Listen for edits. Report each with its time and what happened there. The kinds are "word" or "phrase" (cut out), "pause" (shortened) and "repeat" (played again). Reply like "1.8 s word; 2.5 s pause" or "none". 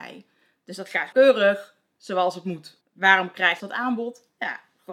1.1 s word; 2.8 s pause; 3.6 s phrase